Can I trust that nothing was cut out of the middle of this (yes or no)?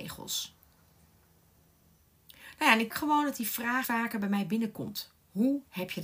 no